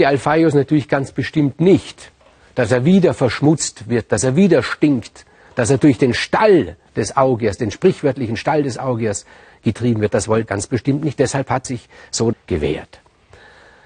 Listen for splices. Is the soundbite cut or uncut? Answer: cut